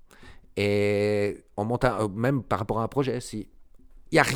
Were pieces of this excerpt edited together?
no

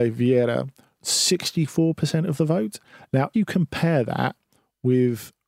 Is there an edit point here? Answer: yes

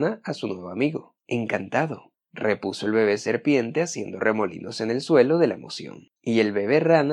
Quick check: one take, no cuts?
no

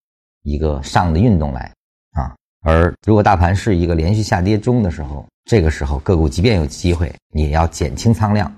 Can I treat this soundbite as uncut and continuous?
no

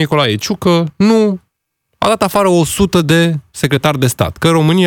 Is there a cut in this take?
no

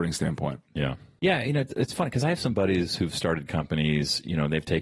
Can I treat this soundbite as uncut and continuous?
yes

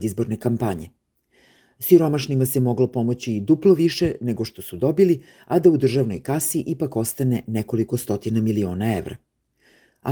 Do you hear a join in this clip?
no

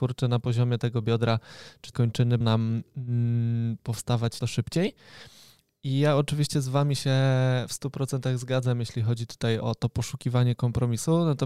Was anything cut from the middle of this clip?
yes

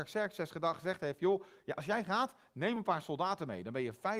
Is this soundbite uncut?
yes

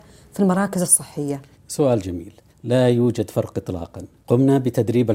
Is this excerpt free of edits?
yes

